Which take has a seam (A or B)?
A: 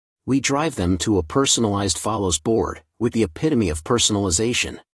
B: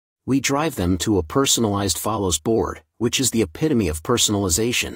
A